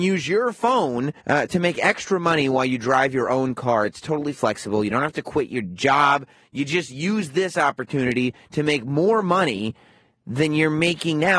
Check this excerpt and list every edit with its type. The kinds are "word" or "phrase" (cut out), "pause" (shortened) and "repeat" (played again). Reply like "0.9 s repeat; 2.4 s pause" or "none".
1.2 s pause